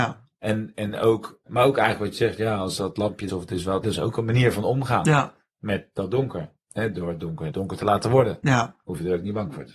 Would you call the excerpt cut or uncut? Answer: cut